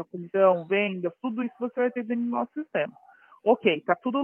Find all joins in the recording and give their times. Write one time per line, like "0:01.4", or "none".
none